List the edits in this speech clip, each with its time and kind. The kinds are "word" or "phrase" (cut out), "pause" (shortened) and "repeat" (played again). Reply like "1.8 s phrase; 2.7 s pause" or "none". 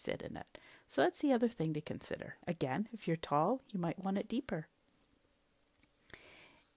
2.4 s pause